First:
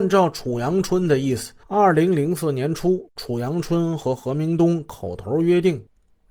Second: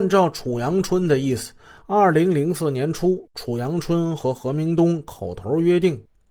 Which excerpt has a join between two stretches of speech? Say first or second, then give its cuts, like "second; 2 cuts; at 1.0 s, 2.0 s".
first; 1 cut; at 1.6 s